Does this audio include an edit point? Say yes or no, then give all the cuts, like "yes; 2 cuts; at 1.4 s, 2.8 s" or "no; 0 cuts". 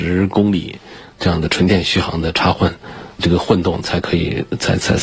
yes; 1 cut; at 3.2 s